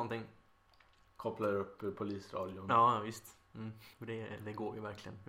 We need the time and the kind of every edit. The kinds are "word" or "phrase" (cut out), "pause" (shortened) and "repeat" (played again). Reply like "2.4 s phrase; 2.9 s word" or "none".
3.9 s pause